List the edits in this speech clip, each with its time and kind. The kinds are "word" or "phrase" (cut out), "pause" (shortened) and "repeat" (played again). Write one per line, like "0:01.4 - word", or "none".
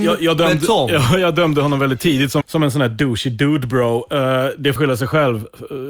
0:02.4 - word
0:04.8 - word

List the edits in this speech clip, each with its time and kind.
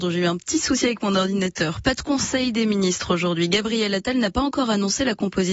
none

